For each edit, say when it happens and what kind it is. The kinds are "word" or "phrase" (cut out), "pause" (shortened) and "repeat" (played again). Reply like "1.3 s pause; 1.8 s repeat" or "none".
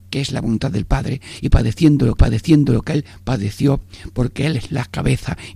2.2 s repeat